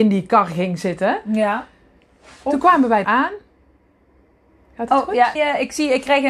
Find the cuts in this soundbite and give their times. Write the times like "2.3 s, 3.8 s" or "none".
3.0 s, 5.4 s